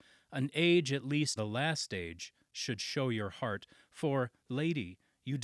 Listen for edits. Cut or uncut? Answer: cut